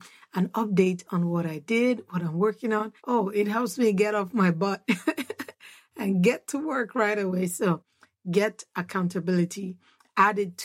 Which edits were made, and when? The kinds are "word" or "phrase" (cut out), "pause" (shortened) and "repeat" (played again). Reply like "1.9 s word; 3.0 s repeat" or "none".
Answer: 3.0 s pause

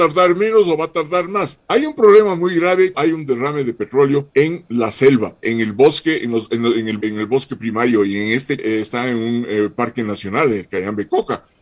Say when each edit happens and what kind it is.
1.6 s pause; 2.9 s word; 4.3 s pause; 5.4 s word; 7.0 s word; 8.6 s phrase

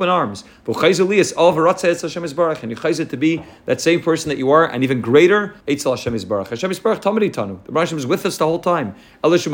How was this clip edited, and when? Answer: 5.6 s pause

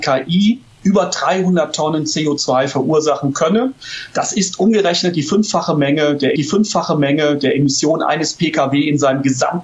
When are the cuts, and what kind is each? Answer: 6.4 s repeat

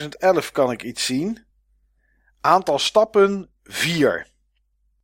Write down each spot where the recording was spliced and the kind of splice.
none

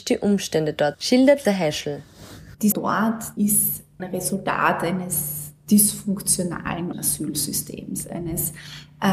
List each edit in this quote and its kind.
0.9 s word; 1.4 s word; 2.7 s word; 3.4 s word; 4.0 s word; 6.9 s word

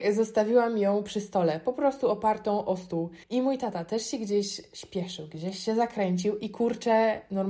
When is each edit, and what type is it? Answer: 3.2 s pause

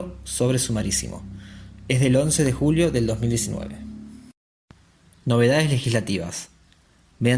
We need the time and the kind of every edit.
none

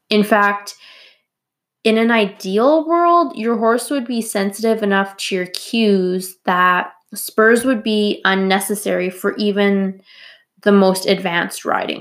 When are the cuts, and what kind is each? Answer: none

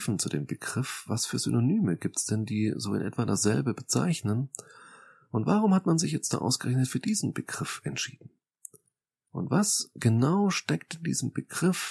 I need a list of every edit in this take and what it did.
none

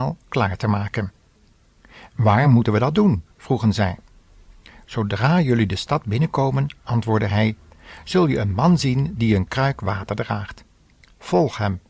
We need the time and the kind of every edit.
none

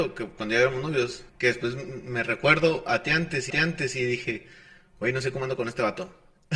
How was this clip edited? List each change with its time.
1.3 s pause; 3.5 s repeat

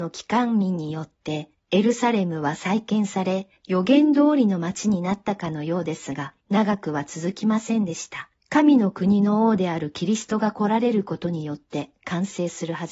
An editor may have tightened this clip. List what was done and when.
1.5 s pause; 3.6 s pause; 6.4 s pause; 8.4 s pause

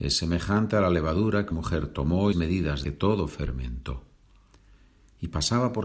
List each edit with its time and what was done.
1.5 s word; 2.3 s phrase; 2.8 s phrase

